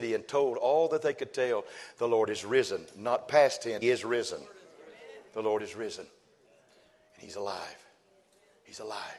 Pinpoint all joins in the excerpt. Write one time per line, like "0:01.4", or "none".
0:03.8
0:05.3